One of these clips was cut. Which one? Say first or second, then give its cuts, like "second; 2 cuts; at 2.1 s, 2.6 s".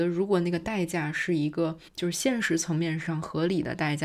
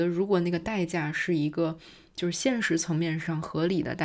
first; 1 cut; at 1.9 s